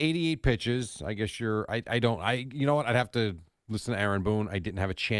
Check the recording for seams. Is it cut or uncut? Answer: uncut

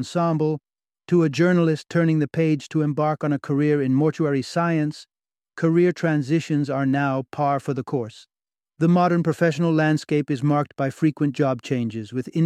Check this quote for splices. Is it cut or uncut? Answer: uncut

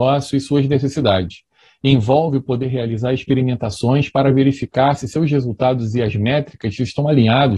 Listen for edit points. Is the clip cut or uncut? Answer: uncut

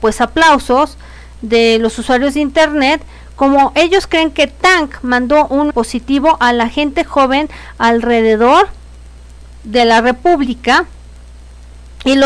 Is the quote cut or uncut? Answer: cut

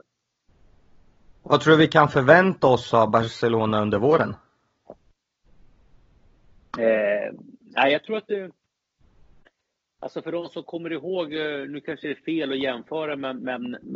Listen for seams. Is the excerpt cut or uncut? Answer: uncut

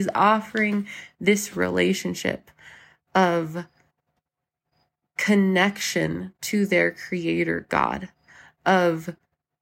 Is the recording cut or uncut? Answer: uncut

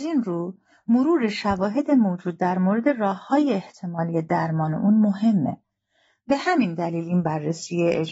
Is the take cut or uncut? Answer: uncut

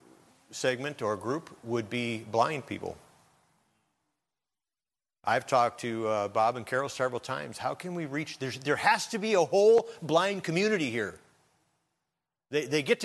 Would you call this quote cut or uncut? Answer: uncut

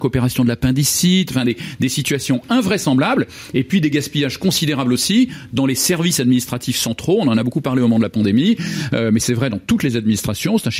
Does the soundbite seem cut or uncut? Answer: uncut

